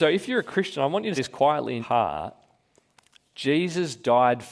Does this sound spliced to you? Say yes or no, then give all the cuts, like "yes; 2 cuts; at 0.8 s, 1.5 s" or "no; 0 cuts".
yes; 2 cuts; at 1.2 s, 1.8 s